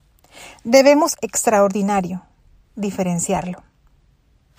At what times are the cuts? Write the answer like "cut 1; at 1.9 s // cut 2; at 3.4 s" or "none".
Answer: cut 1; at 1.1 s